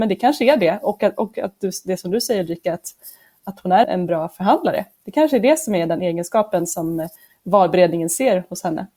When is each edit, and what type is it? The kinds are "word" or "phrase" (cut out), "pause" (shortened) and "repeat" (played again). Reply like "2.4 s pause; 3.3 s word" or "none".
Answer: 3.8 s word